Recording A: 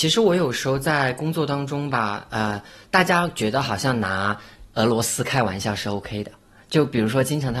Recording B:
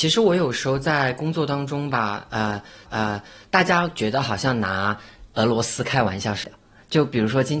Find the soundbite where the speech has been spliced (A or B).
B